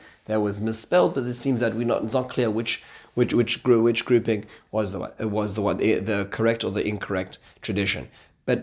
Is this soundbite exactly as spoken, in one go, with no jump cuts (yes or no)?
yes